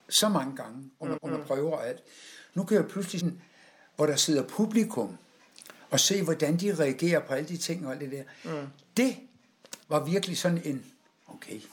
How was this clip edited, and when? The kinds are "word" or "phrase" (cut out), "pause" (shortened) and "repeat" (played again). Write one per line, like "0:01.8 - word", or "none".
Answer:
0:01.2 - repeat
0:03.2 - word
0:09.8 - pause